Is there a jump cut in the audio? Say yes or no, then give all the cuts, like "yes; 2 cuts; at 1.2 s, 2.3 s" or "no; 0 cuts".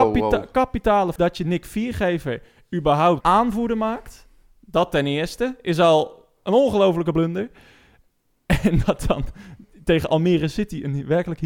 yes; 2 cuts; at 1.2 s, 3.2 s